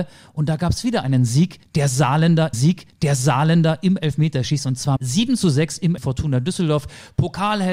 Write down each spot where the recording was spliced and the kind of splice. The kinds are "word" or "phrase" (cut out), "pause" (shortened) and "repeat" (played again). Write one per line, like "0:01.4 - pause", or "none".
0:02.5 - repeat
0:05.0 - word
0:06.0 - phrase